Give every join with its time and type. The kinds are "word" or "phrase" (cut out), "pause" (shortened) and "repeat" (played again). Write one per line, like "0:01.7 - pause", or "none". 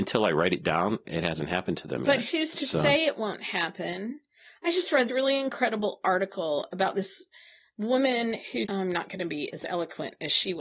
0:01.0 - word
0:05.1 - word
0:08.7 - word